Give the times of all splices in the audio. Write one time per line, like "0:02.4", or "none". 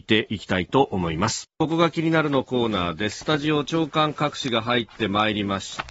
0:01.5